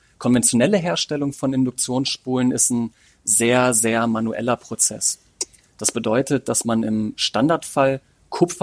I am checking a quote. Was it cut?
no; 0 cuts

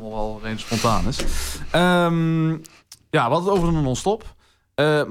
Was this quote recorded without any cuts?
yes; 0 cuts

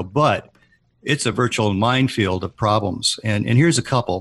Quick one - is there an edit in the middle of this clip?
no; 0 cuts

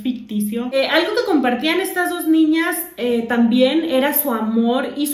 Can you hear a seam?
no; 0 cuts

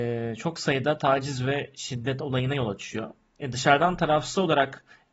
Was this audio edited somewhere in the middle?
no; 0 cuts

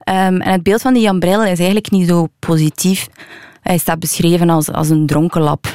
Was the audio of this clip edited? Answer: no; 0 cuts

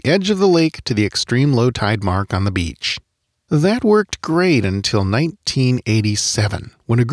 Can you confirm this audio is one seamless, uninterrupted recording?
yes; 0 cuts

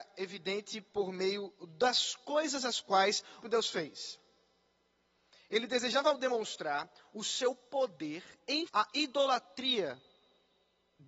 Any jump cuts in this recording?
yes; 2 cuts; at 3.4 s, 8.7 s

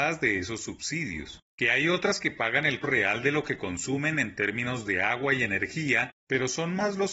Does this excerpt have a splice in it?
yes; 1 cut; at 2.8 s

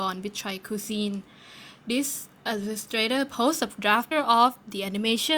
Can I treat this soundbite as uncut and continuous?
no; 1 cut; at 4.1 s

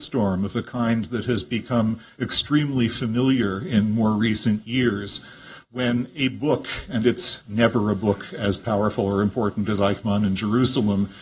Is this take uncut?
yes; 0 cuts

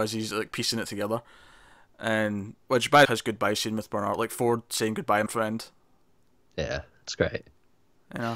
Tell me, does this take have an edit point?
yes; 3 cuts; at 2.6 s, 3.0 s, 5.3 s

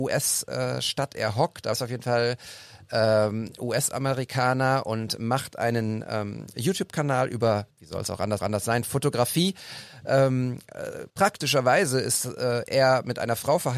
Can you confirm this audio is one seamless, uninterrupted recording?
no; 4 cuts; at 1.7 s, 7.7 s, 8.4 s, 11.1 s

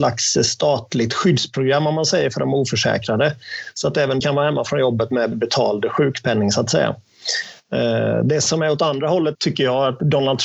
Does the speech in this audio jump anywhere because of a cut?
yes; 3 cuts; at 4.2 s, 5.3 s, 9.3 s

